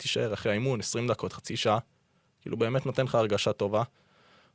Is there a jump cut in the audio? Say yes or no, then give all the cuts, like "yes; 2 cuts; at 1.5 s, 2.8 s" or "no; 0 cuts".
no; 0 cuts